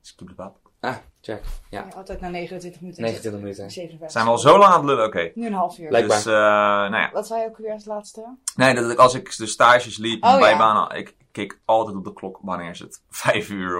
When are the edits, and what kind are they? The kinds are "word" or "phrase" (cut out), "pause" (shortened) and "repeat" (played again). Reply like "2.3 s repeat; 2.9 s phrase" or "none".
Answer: 1.1 s pause